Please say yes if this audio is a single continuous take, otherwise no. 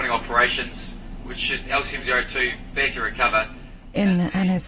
no